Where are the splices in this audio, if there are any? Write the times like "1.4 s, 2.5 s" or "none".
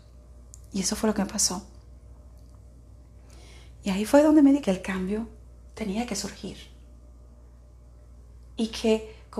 4.6 s